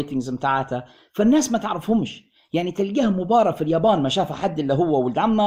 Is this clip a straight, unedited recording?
yes; 0 cuts

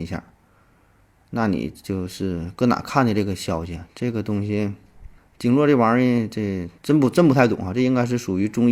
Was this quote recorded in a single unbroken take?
no; 2 cuts; at 5.2 s, 6.8 s

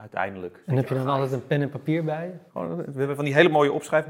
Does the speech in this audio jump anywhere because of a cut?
no; 0 cuts

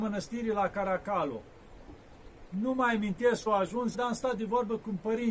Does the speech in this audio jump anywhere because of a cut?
yes; 2 cuts; at 3.5 s, 3.9 s

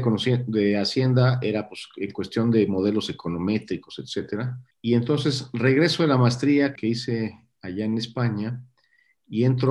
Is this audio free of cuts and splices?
no; 2 cuts; at 4.7 s, 6.8 s

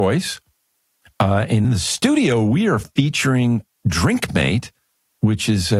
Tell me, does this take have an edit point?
no; 0 cuts

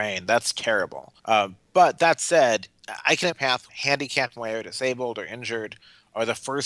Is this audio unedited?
no; 4 cuts; at 1.2 s, 3.3 s, 3.7 s, 4.4 s

